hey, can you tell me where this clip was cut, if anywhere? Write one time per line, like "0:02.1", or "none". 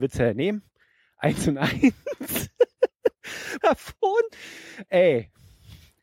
0:03.6